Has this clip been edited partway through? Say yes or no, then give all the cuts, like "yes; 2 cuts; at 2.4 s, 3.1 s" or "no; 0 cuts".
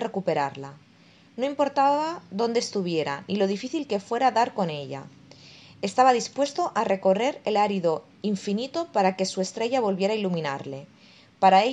no; 0 cuts